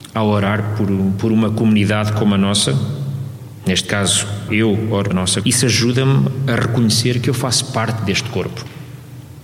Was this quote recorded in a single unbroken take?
no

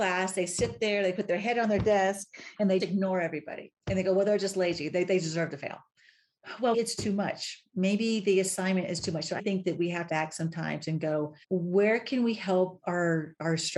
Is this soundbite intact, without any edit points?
no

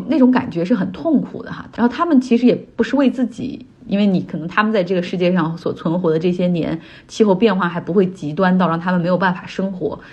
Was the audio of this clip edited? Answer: no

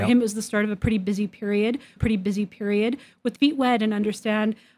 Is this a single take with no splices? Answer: no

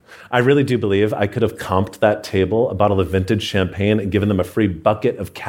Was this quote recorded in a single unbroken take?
yes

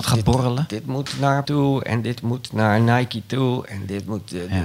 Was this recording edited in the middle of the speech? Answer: yes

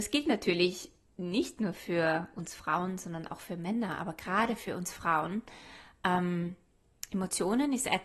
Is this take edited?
no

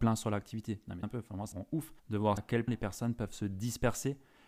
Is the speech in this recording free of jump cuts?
no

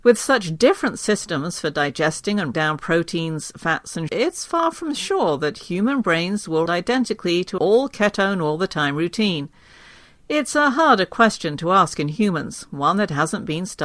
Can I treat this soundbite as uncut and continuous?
no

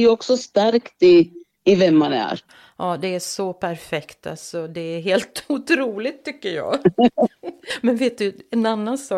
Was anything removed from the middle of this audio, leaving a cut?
no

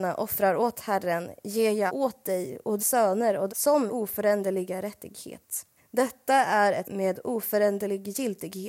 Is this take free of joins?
no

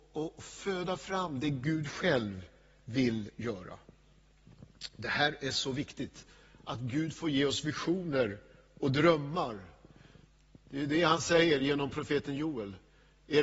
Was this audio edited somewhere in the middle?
no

